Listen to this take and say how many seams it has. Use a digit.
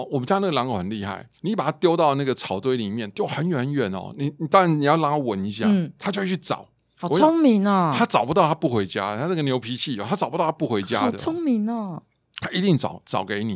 1